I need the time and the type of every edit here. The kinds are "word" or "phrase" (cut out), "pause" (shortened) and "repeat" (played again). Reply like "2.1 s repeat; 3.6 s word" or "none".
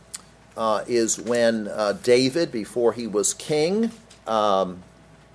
4.1 s pause